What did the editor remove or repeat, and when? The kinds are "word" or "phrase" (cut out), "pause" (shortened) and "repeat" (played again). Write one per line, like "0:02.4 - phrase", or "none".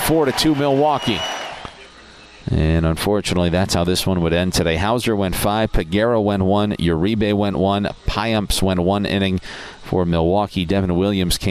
none